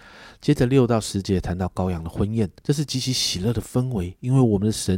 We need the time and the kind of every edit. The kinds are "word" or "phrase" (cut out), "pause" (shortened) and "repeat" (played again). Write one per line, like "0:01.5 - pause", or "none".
0:02.6 - pause